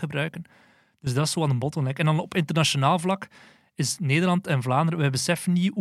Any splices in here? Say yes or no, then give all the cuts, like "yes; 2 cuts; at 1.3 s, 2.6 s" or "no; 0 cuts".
no; 0 cuts